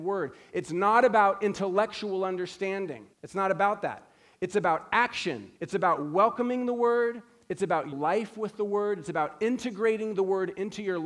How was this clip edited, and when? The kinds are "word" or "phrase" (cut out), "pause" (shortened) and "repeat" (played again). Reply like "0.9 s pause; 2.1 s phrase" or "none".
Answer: 3.1 s pause; 5.6 s pause; 7.9 s phrase